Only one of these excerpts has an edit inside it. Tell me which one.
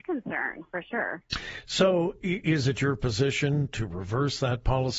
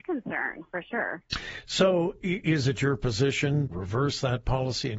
second; 1 cut; at 3.7 s

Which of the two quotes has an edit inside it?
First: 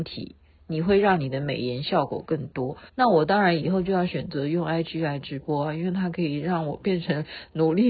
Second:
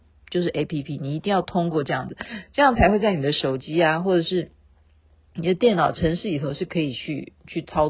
first; 1 cut; at 2.9 s

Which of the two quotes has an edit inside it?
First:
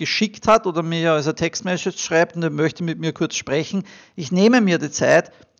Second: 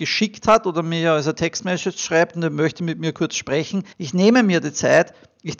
second; 1 cut; at 3.9 s

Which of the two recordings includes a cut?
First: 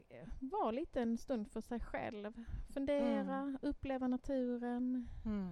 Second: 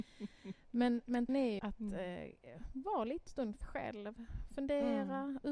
second; 4 cuts; at 1.3 s, 1.6 s, 3.3 s, 3.6 s

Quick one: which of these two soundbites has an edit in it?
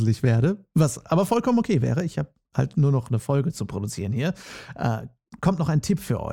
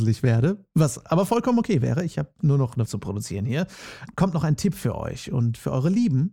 second; 3 cuts; at 2.4 s, 2.9 s, 4.1 s

